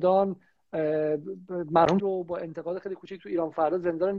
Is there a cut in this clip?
yes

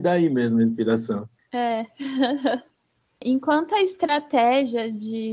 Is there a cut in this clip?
no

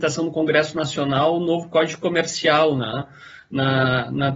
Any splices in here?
no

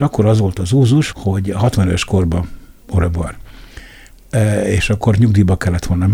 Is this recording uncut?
no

